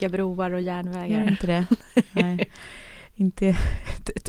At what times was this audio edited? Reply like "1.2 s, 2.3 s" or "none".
none

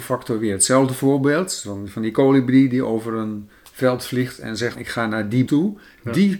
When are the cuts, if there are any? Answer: 4.8 s, 5.5 s

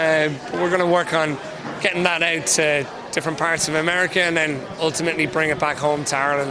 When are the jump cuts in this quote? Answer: none

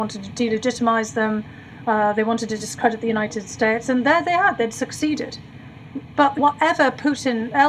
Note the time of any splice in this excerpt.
6.4 s

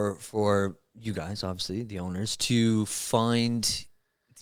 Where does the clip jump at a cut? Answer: none

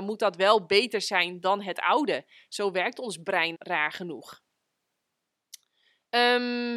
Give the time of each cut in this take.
3.5 s

